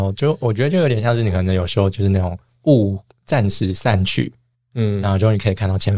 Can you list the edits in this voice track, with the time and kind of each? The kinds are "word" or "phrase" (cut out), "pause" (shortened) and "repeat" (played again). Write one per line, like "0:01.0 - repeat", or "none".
none